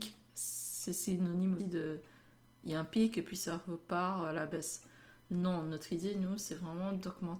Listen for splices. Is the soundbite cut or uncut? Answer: cut